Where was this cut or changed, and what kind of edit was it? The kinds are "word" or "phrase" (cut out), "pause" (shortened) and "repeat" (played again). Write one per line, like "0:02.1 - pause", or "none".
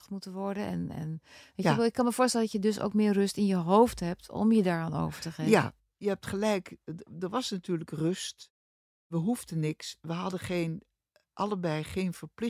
none